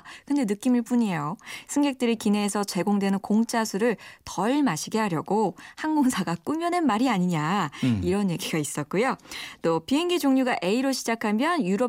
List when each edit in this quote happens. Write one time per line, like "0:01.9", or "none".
none